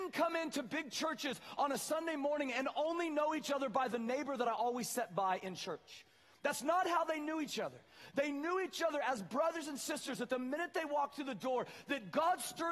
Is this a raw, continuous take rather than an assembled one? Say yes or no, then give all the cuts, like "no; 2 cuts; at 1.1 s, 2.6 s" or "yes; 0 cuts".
yes; 0 cuts